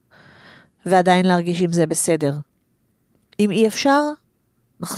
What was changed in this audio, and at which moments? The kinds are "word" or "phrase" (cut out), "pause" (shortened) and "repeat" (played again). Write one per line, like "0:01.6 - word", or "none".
none